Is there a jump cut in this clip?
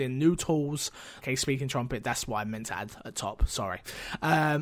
yes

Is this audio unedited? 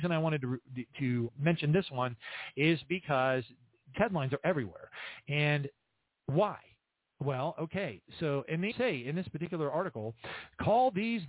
no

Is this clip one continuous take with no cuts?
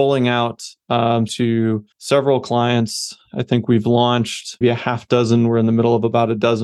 no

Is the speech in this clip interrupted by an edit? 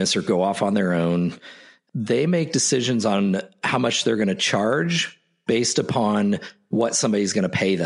no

